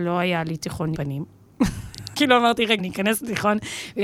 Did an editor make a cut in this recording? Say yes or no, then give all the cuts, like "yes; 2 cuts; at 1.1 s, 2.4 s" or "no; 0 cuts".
yes; 3 cuts; at 0.9 s, 2.1 s, 2.8 s